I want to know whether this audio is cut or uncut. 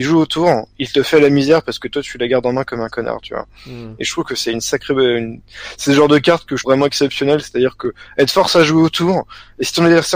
cut